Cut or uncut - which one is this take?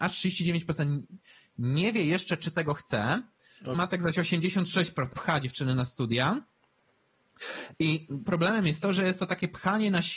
cut